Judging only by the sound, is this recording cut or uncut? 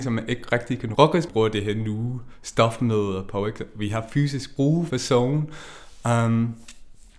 cut